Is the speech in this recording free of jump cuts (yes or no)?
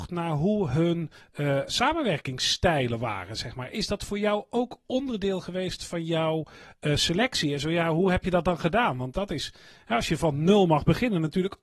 no